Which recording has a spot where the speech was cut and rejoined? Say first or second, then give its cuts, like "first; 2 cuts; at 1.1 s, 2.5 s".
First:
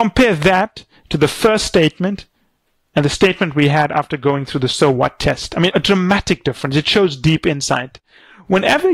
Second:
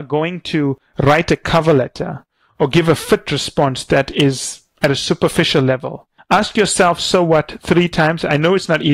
second; 1 cut; at 6.2 s